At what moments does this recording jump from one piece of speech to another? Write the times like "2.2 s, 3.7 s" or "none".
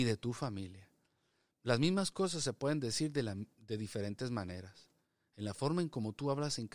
none